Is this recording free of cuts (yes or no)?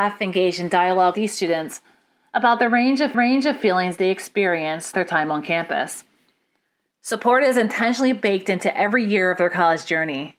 no